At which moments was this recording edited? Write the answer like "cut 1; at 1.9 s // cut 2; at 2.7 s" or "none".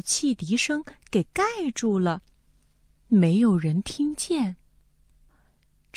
none